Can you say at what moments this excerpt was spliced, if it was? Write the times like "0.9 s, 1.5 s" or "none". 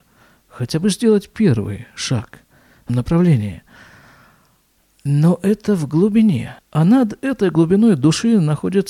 2.9 s, 6.6 s